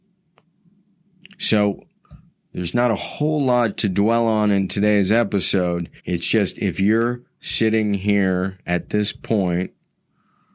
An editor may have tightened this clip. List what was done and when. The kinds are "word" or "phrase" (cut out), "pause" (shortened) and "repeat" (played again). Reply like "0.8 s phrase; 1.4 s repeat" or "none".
6.0 s pause